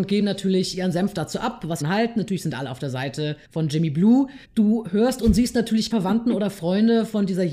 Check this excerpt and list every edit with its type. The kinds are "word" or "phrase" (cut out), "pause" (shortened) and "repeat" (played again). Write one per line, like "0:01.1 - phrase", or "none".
0:01.8 - word
0:03.4 - pause
0:04.4 - pause
0:05.9 - word